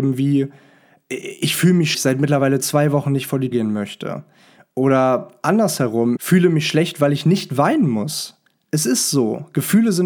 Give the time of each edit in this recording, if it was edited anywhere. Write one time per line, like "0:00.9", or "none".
0:01.9
0:03.5
0:06.2

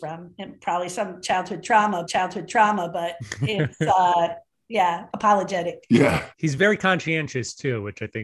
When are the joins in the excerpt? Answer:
0:02.1
0:05.1
0:06.3

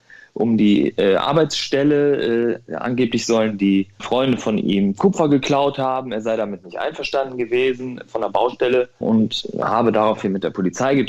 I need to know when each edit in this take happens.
0:04.0
0:09.0

